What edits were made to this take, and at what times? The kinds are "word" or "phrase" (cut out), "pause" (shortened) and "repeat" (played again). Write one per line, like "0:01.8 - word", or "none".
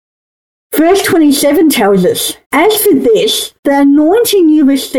0:02.4 - pause
0:03.6 - pause